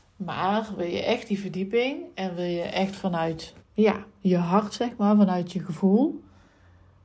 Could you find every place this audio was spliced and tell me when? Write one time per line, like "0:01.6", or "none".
0:03.6